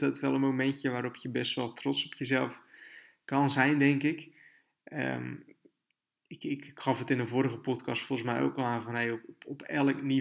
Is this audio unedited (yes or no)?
yes